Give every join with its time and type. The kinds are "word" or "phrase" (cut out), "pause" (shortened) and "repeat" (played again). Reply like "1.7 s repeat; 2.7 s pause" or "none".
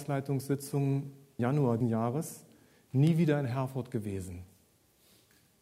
1.4 s word; 1.8 s word

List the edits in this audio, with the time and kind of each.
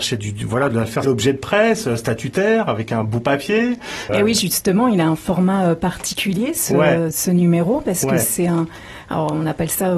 1.0 s phrase

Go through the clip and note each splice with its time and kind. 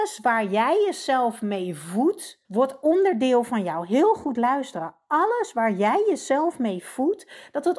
2.4 s pause

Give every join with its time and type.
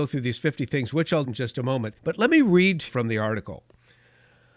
1.2 s word; 2.0 s pause; 2.9 s word

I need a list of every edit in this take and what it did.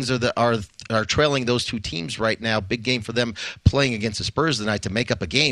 none

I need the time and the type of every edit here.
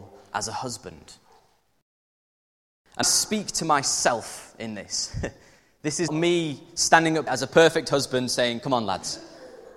3.0 s word; 6.1 s word; 7.3 s word

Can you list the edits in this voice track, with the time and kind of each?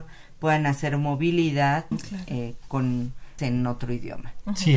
1.9 s word; 3.4 s word

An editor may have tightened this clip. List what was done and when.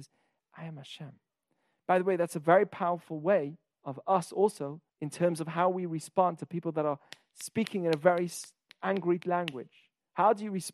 4.9 s pause

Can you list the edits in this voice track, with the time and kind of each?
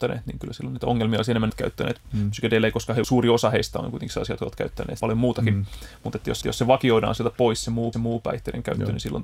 1.5 s phrase; 3.0 s phrase; 5.0 s word; 6.4 s repeat; 7.9 s repeat

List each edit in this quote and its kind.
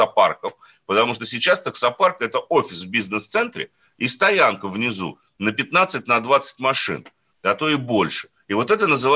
none

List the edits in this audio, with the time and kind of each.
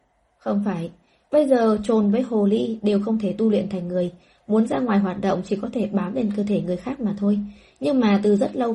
none

